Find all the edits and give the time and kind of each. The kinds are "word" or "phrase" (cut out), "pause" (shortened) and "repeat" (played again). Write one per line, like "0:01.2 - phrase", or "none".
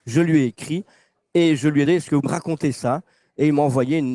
0:01.9 - word
0:02.2 - word